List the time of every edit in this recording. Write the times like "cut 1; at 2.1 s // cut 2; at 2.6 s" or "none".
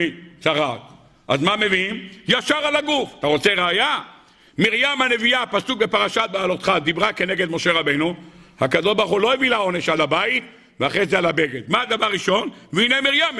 none